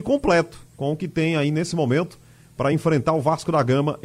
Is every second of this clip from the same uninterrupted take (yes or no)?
yes